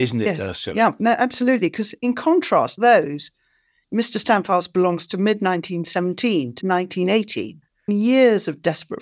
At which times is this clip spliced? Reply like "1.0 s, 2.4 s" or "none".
2.8 s, 6.6 s, 7.9 s